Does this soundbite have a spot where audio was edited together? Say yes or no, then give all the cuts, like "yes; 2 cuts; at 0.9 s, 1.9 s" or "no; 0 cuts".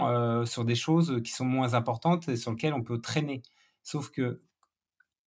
no; 0 cuts